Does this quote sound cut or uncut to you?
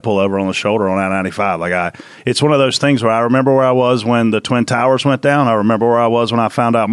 uncut